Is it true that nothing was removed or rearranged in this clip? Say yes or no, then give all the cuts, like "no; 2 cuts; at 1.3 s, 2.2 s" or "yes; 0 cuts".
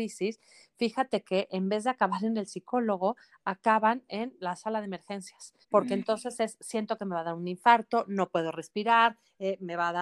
no; 1 cut; at 5.6 s